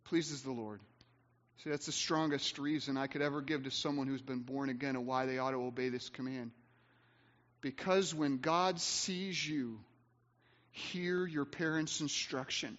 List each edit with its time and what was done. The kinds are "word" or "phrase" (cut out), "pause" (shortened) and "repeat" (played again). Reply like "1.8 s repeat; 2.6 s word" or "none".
none